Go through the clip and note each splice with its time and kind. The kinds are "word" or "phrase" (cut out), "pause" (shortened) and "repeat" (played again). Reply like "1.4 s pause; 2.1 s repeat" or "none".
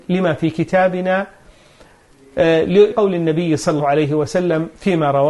2.9 s word; 3.8 s word